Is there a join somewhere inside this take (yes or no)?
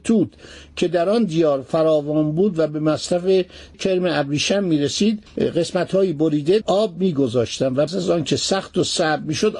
yes